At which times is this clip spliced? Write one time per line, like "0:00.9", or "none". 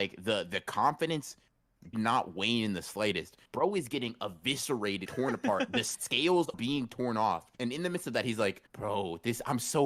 0:01.9
0:03.5
0:05.1
0:06.5
0:07.5
0:08.7